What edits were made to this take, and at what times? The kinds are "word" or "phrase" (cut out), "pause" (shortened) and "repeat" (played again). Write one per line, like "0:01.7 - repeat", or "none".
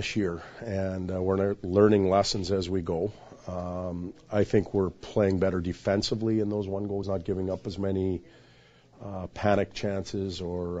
0:07.0 - word